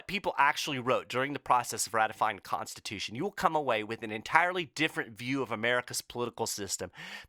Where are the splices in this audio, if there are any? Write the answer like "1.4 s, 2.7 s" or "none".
none